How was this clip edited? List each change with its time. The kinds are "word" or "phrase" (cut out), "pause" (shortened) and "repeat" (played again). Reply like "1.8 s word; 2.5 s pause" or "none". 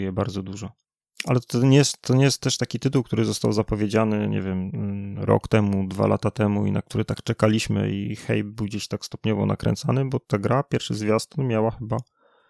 10.2 s pause